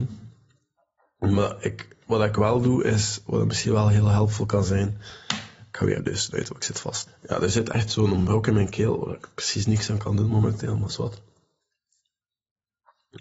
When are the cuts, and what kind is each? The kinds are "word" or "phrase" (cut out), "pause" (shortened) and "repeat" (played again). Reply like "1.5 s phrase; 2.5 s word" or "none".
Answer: 6.0 s word

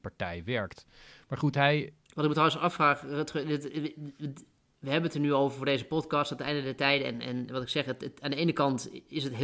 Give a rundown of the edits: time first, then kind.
none

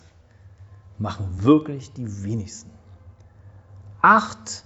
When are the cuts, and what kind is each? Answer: none

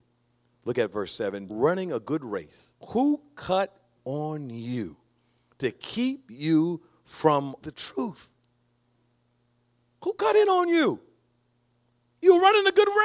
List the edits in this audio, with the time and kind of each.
1.5 s phrase; 2.8 s pause; 4.0 s word; 7.6 s word

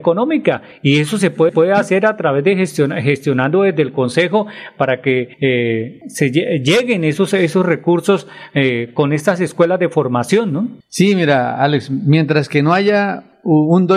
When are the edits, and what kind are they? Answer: 1.5 s repeat; 5.3 s pause

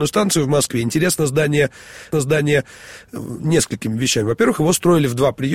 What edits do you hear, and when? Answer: 2.1 s repeat

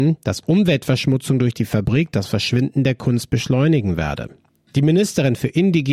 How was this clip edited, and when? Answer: none

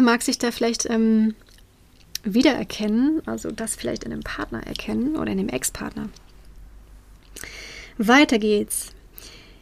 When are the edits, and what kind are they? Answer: none

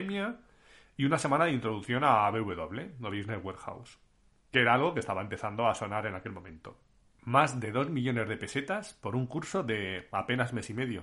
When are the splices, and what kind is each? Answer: none

